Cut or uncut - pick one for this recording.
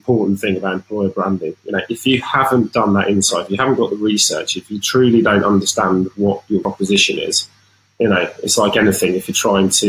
uncut